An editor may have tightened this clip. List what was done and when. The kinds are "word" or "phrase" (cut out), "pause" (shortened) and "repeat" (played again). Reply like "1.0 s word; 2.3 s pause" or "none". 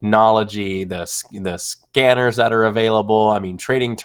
none